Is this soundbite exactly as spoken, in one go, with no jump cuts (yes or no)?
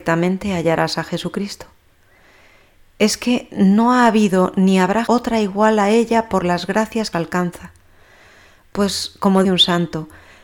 no